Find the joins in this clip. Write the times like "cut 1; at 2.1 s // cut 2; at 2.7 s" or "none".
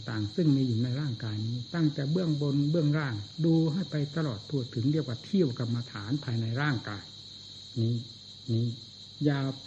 cut 1; at 8.5 s